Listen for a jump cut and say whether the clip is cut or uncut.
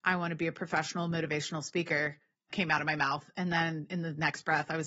uncut